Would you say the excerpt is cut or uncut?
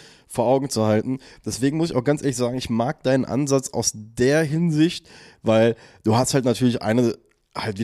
uncut